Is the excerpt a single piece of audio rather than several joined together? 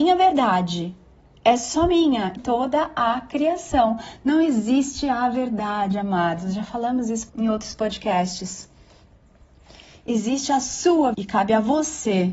no; 3 cuts; at 2.4 s, 7.3 s, 11.1 s

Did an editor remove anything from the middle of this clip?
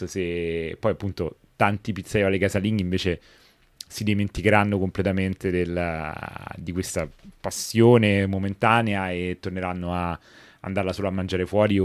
no; 0 cuts

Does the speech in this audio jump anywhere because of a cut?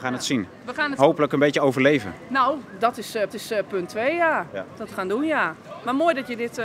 yes; 3 cuts; at 1.0 s, 3.3 s, 4.9 s

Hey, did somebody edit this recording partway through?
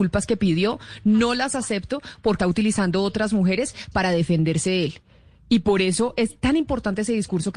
yes; 1 cut; at 2.4 s

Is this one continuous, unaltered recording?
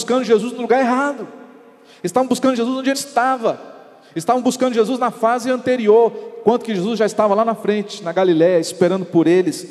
no; 1 cut; at 2.9 s

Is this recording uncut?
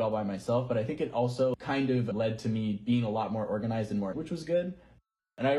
no; 2 cuts; at 2.1 s, 4.1 s

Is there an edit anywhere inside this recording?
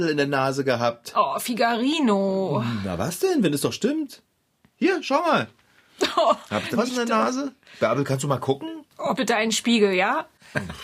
yes; 2 cuts; at 6.7 s, 9.1 s

